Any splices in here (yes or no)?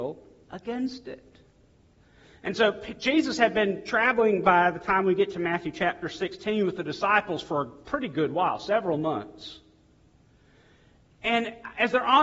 no